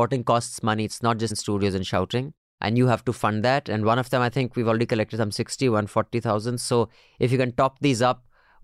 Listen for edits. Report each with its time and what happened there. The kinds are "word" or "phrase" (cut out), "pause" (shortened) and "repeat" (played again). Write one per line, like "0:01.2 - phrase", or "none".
0:01.3 - word